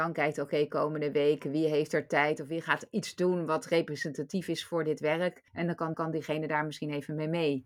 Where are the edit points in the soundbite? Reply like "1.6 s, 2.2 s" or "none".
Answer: 5.5 s, 5.9 s